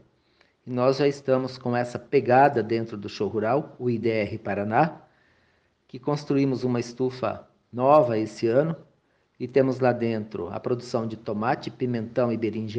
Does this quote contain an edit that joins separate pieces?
no; 0 cuts

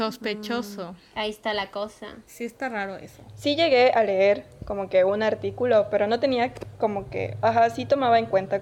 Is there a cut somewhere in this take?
yes; 1 cut; at 2.3 s

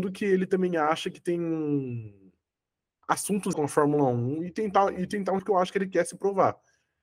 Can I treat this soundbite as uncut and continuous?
no; 2 cuts; at 3.5 s, 5.4 s

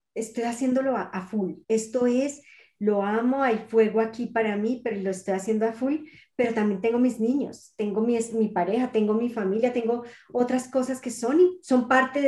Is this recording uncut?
no; 1 cut; at 1.6 s

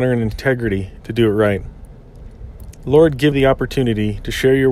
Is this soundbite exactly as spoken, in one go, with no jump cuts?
no; 1 cut; at 3.3 s

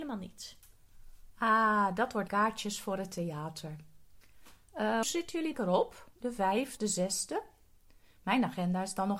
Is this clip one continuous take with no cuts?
no; 4 cuts; at 2.3 s, 5.0 s, 5.5 s, 6.8 s

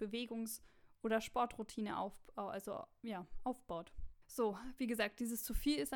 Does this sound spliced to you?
yes; 1 cut; at 4.2 s

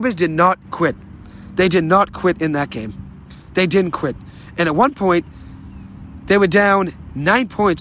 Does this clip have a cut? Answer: no; 0 cuts

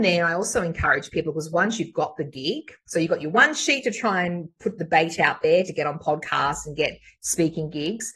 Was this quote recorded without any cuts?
yes; 0 cuts

